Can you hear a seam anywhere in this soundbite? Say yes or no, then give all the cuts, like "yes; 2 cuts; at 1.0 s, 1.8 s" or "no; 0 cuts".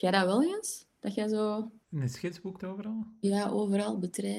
yes; 2 cuts; at 1.8 s, 2.6 s